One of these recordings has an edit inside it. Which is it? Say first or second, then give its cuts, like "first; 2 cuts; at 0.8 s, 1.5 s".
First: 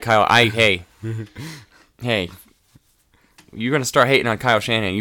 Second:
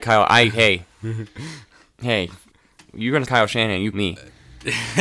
second; 3 cuts; at 2.5 s, 3.2 s, 3.9 s